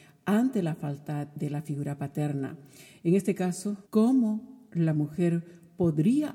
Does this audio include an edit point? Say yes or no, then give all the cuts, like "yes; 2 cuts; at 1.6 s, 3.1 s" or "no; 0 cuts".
yes; 1 cut; at 3.9 s